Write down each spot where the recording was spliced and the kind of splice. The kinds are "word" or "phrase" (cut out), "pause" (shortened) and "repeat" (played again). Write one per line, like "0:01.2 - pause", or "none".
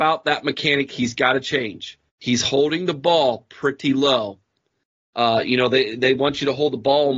0:02.1 - pause